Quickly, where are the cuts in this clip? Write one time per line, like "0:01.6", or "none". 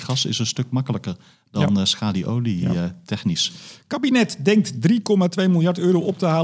none